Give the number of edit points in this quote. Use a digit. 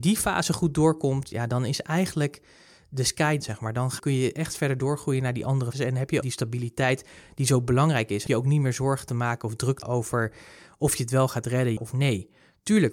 7